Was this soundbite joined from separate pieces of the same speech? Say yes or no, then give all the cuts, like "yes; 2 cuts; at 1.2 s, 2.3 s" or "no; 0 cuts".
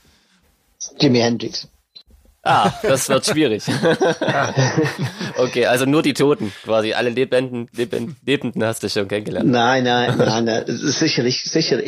no; 0 cuts